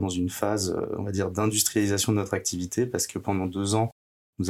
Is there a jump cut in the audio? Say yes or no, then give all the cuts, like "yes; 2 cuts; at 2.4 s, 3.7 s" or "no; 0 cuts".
no; 0 cuts